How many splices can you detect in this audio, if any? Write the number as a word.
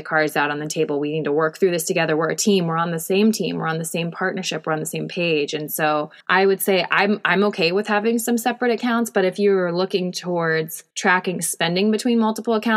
two